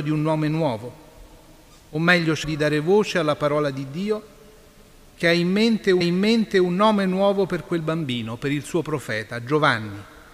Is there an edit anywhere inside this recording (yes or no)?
yes